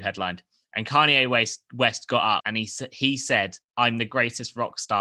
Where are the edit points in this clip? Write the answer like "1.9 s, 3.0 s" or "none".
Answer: 2.4 s, 3.6 s

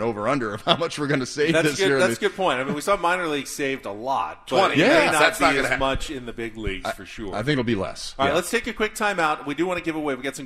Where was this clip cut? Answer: none

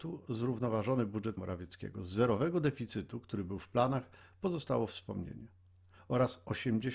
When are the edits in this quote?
1.4 s

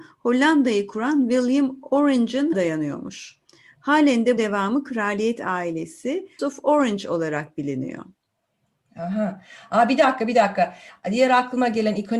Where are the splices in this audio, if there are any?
2.5 s, 4.4 s, 6.4 s

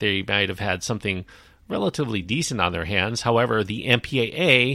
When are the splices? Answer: none

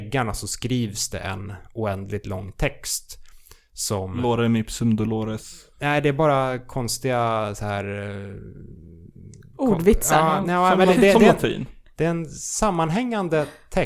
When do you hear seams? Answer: 5.7 s

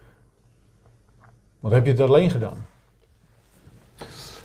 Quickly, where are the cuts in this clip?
none

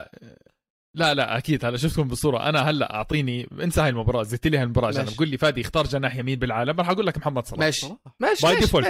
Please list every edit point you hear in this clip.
none

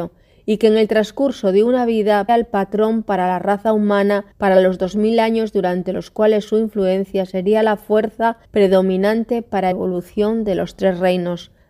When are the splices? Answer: 2.3 s, 4.3 s, 8.4 s, 9.7 s

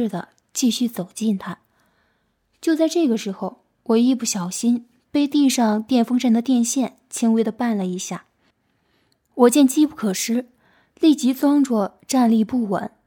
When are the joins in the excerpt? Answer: 8.5 s

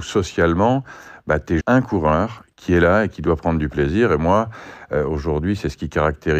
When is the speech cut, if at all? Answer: 1.6 s

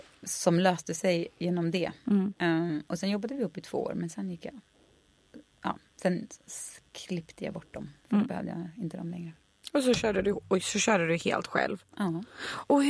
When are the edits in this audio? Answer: 2.4 s

